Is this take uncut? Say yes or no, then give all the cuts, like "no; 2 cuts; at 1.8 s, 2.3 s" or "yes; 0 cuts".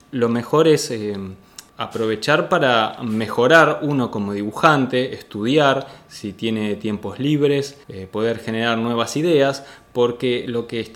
no; 2 cuts; at 1.7 s, 7.8 s